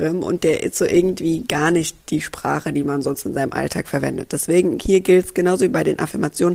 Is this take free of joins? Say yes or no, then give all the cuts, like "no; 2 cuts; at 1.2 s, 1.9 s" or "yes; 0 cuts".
no; 1 cut; at 2.0 s